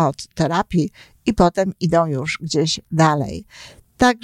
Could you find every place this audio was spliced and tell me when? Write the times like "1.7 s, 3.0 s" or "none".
none